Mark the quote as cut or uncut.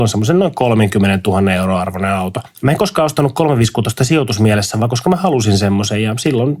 uncut